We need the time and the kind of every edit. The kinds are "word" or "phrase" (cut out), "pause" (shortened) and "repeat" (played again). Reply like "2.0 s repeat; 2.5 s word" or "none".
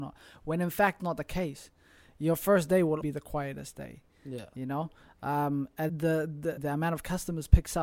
1.0 s word; 3.0 s word; 5.9 s word; 6.6 s word